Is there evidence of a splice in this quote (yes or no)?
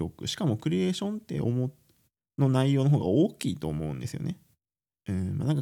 yes